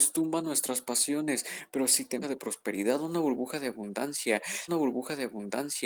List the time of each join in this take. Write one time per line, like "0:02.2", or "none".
0:02.2
0:04.7